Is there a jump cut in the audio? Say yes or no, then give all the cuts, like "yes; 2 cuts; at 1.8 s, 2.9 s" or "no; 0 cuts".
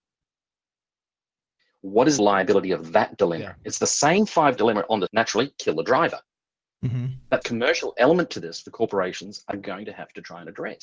yes; 5 cuts; at 2.2 s, 4.6 s, 5.1 s, 7.4 s, 8.6 s